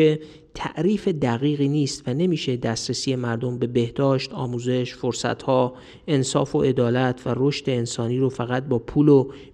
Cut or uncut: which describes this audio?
uncut